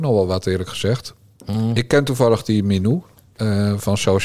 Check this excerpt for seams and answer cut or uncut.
uncut